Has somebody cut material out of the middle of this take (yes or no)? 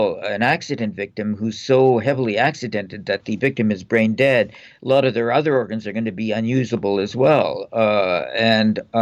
no